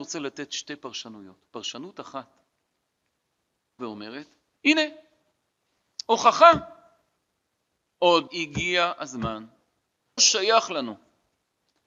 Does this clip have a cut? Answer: yes; 3 cuts; at 3.8 s, 8.3 s, 10.2 s

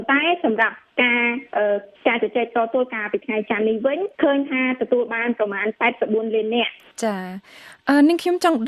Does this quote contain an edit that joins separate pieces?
yes; 2 cuts; at 1.9 s, 4.1 s

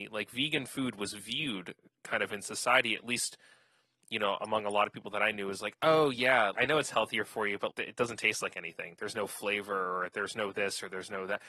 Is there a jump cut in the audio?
yes; 2 cuts; at 6.5 s, 7.7 s

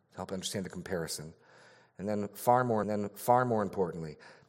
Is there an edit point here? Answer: yes; 1 cut; at 2.8 s

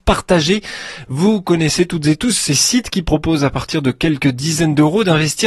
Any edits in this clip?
no; 0 cuts

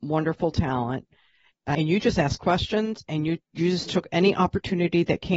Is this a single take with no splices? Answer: yes; 0 cuts

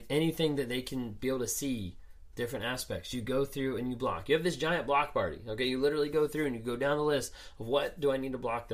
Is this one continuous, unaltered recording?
yes; 0 cuts

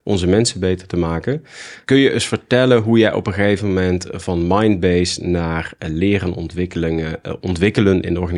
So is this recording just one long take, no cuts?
yes; 0 cuts

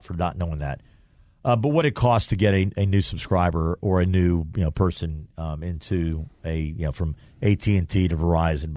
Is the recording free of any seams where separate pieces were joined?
yes; 0 cuts

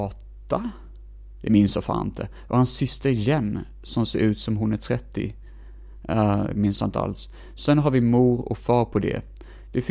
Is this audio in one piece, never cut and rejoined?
yes; 0 cuts

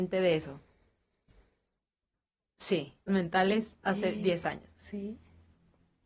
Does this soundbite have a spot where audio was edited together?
yes; 2 cuts; at 3.1 s, 3.8 s

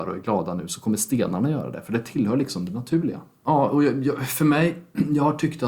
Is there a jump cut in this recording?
no; 0 cuts

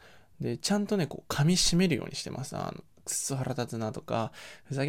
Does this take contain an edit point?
no; 0 cuts

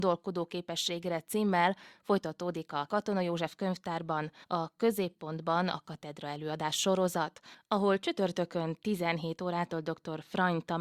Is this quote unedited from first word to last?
no; 2 cuts; at 2.9 s, 4.4 s

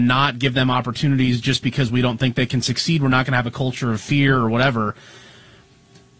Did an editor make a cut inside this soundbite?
no; 0 cuts

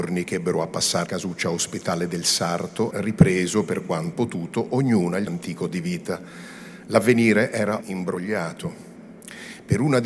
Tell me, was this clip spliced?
yes; 6 cuts; at 1.1 s, 2.9 s, 4.1 s, 5.3 s, 5.7 s, 7.8 s

